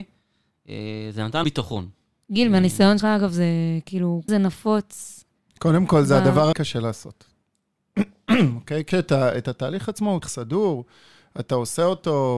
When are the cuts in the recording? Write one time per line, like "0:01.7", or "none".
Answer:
0:01.4
0:03.0
0:04.3
0:06.5
0:08.9
0:10.2